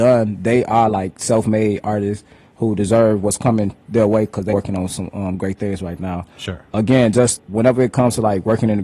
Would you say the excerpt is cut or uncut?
cut